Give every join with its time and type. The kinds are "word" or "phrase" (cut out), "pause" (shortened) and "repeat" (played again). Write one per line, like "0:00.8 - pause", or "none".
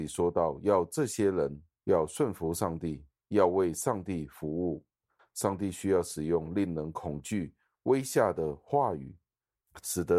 none